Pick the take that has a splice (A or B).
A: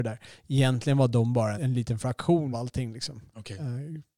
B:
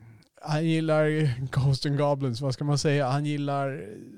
A